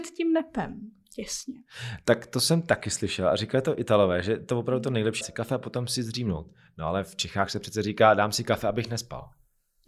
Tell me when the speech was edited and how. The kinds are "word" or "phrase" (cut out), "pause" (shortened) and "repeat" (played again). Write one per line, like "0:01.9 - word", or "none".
0:05.2 - word